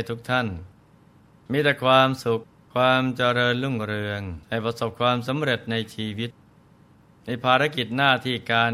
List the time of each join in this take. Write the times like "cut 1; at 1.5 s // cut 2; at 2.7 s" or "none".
cut 1; at 2.5 s // cut 2; at 4.4 s